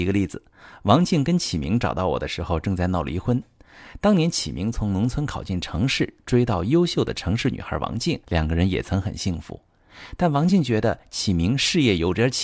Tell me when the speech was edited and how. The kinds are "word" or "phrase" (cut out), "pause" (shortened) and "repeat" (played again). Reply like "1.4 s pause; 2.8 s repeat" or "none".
8.2 s pause